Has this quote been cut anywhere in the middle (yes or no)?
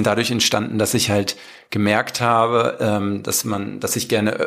no